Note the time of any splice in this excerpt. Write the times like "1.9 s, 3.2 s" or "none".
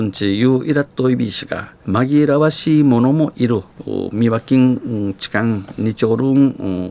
1.8 s